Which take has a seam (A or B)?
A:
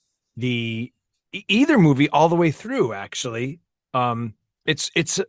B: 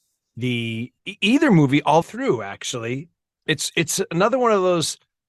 B